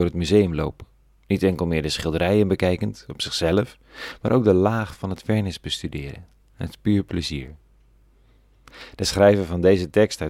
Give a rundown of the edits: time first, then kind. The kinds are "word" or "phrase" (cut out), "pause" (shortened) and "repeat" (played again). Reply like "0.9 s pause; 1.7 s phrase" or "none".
none